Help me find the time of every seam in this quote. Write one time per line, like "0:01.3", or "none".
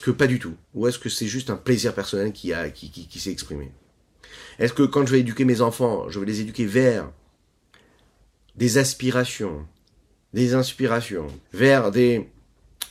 0:11.4